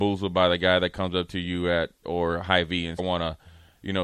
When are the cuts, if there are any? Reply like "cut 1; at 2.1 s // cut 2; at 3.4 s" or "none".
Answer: cut 1; at 2.0 s // cut 2; at 3.0 s

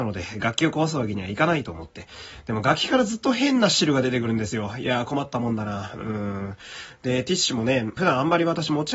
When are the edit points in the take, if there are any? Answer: cut 1; at 8.0 s

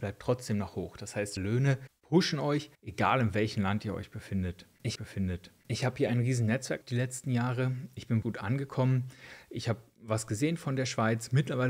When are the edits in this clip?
cut 1; at 1.4 s // cut 2; at 2.7 s // cut 3; at 4.9 s // cut 4; at 6.8 s // cut 5; at 8.2 s

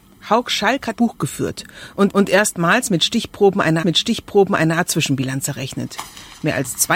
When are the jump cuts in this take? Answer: cut 1; at 0.9 s // cut 2; at 2.1 s // cut 3; at 3.8 s

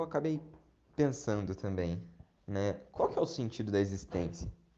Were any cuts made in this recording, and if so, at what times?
cut 1; at 2.4 s

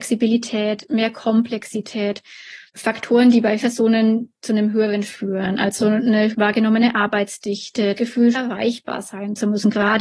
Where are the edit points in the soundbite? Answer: cut 1; at 2.7 s // cut 2; at 3.6 s // cut 3; at 5.1 s // cut 4; at 6.3 s // cut 5; at 8.0 s // cut 6; at 8.3 s

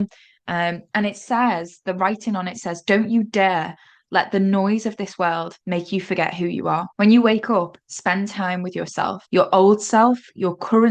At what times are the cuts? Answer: cut 1; at 5.6 s // cut 2; at 6.9 s // cut 3; at 7.8 s // cut 4; at 9.3 s

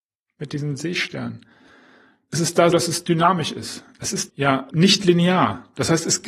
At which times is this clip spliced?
cut 1; at 2.7 s // cut 2; at 4.3 s // cut 3; at 4.7 s

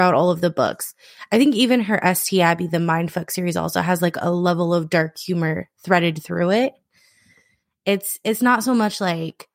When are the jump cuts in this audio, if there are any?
none

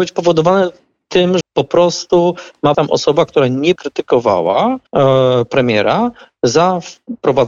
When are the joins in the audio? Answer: cut 1; at 1.4 s // cut 2; at 2.7 s // cut 3; at 3.8 s // cut 4; at 4.9 s

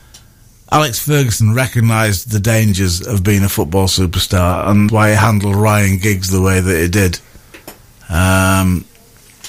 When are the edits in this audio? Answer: cut 1; at 4.9 s

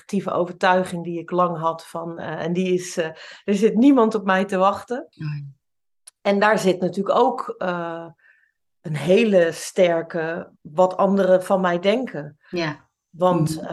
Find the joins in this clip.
cut 1; at 5.1 s // cut 2; at 10.6 s

